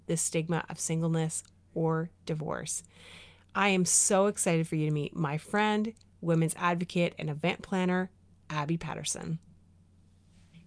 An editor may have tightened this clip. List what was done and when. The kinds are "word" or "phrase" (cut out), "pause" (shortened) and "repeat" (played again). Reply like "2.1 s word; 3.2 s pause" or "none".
none